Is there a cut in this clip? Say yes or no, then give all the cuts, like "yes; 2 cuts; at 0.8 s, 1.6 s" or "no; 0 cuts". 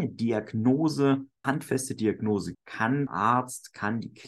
yes; 3 cuts; at 1.4 s, 2.5 s, 3.1 s